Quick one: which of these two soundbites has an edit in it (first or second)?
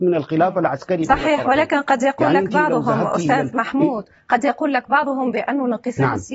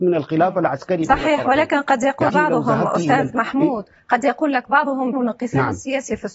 second